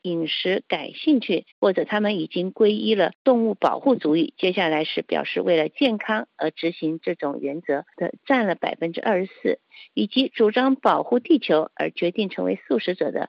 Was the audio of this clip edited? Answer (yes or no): yes